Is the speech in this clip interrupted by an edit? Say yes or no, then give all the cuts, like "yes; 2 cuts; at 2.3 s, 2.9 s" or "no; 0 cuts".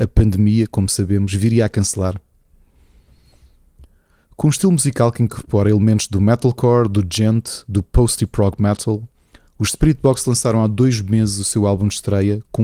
no; 0 cuts